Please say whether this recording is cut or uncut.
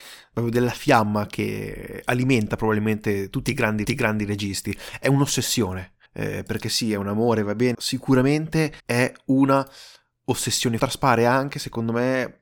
cut